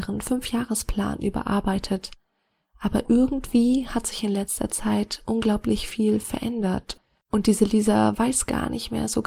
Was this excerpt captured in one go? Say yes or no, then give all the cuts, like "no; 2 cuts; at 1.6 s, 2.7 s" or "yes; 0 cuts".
yes; 0 cuts